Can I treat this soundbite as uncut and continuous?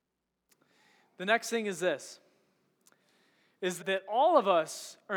no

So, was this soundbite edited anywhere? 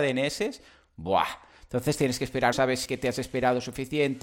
yes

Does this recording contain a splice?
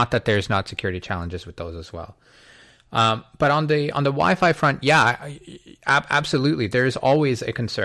no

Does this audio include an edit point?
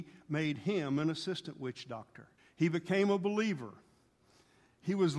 yes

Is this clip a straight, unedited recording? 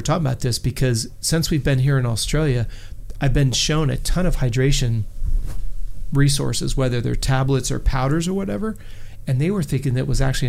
yes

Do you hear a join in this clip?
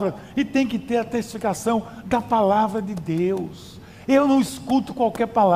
no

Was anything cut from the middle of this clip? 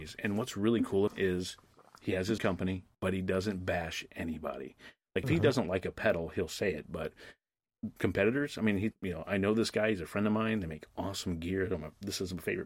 yes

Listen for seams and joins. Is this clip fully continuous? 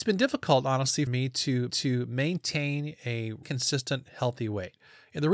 no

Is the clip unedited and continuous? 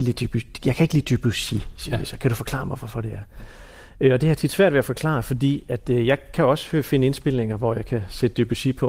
yes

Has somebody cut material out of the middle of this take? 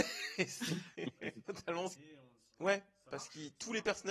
yes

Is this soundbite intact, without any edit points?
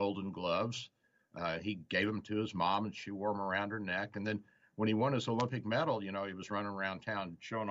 yes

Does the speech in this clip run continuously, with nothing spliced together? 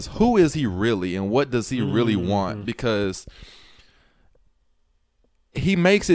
yes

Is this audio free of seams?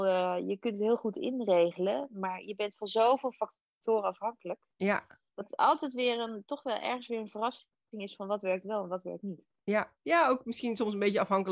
yes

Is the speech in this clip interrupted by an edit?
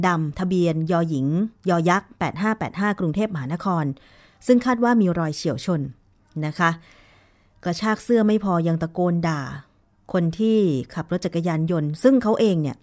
no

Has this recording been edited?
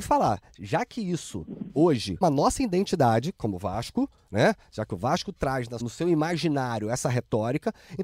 yes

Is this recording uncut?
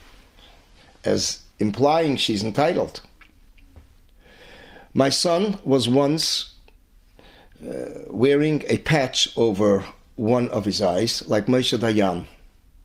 yes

